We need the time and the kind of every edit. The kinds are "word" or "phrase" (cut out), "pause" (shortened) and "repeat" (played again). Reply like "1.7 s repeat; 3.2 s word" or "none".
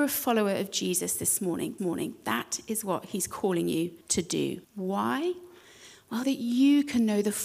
1.8 s repeat; 4.0 s pause; 4.6 s pause; 6.2 s word